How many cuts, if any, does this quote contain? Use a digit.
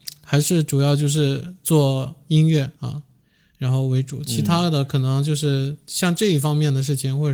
1